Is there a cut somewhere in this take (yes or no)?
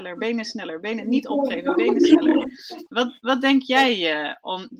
no